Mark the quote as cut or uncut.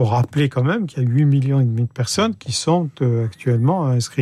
uncut